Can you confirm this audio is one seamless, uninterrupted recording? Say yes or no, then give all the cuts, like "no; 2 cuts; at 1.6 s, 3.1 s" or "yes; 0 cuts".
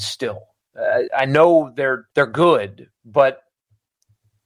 no; 2 cuts; at 1.1 s, 2.1 s